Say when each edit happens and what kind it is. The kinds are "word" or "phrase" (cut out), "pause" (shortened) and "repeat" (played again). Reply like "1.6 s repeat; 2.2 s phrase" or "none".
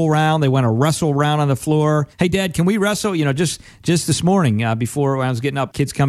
2.1 s pause